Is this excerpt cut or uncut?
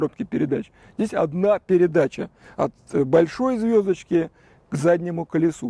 uncut